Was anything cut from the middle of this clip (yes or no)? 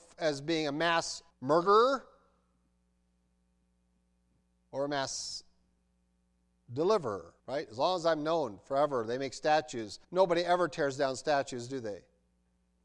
yes